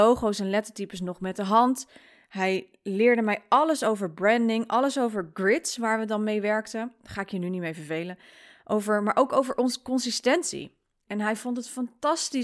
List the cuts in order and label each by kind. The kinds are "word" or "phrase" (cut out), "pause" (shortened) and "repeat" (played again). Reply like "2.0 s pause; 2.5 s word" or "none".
none